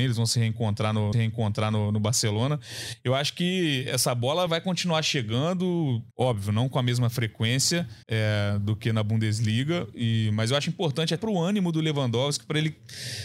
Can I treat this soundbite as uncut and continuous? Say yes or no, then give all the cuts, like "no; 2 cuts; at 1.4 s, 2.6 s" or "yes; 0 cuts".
no; 5 cuts; at 1.1 s, 4.5 s, 6.1 s, 8.0 s, 11.2 s